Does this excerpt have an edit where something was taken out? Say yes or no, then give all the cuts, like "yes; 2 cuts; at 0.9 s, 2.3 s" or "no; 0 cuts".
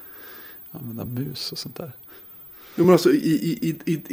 no; 0 cuts